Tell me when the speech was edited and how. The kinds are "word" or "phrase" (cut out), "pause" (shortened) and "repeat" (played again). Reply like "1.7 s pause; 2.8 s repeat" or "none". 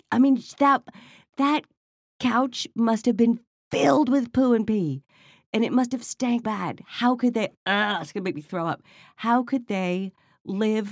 6.4 s word